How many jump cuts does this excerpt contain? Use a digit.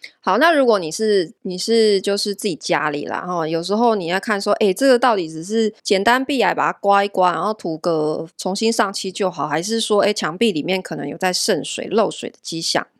3